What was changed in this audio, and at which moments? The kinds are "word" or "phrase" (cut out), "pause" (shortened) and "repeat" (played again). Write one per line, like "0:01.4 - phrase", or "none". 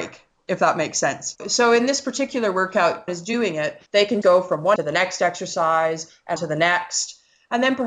0:01.4 - word
0:03.1 - phrase
0:03.9 - pause
0:04.2 - word
0:04.8 - phrase
0:06.4 - word